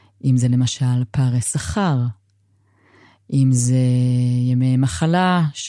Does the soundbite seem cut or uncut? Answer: uncut